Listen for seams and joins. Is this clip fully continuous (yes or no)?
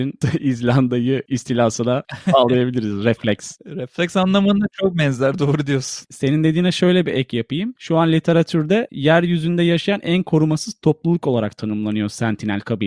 yes